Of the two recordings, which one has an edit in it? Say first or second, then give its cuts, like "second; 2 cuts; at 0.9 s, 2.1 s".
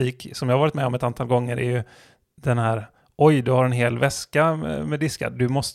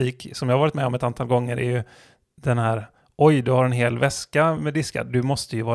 second; 1 cut; at 4.6 s